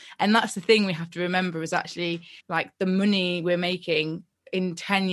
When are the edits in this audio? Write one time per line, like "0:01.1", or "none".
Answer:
0:02.4